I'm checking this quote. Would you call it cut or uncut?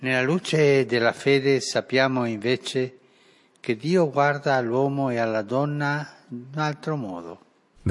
uncut